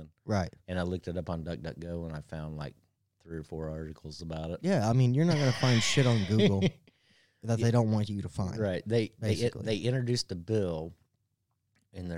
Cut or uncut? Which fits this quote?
uncut